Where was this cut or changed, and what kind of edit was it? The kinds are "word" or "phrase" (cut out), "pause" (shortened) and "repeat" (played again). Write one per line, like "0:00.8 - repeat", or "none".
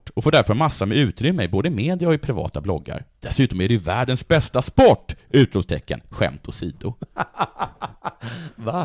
none